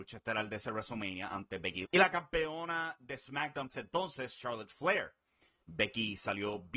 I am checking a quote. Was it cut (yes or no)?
yes